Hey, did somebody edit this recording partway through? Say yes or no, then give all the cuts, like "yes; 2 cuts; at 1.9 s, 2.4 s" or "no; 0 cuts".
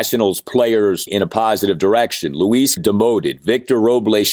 yes; 2 cuts; at 1.1 s, 2.8 s